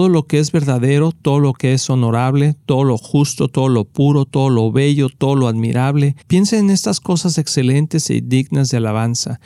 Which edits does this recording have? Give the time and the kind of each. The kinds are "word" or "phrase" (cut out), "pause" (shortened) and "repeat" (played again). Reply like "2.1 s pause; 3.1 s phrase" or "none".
6.2 s pause